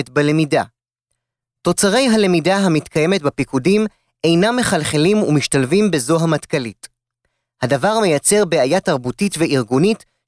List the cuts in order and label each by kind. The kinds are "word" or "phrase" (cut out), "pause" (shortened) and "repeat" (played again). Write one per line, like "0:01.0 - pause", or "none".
none